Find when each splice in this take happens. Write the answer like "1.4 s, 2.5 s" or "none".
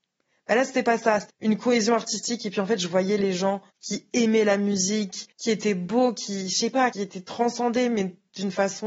1.3 s, 3.7 s, 5.3 s, 6.9 s